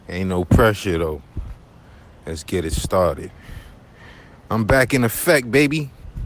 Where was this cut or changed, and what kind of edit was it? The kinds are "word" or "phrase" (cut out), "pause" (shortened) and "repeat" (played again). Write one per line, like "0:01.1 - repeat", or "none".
none